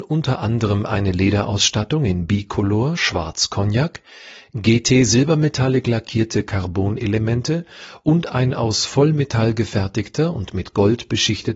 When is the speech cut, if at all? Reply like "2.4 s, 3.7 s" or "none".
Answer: none

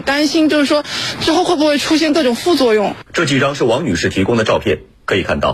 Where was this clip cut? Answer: 3.1 s

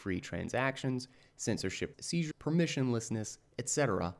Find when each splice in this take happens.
1.9 s, 2.3 s

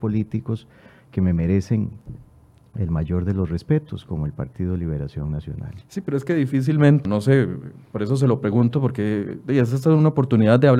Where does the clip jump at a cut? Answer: 7.0 s

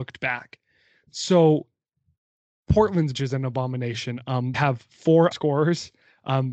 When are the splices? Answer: 3.1 s, 4.5 s, 5.3 s

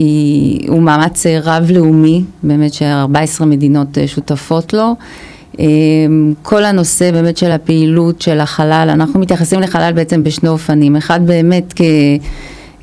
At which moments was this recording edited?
none

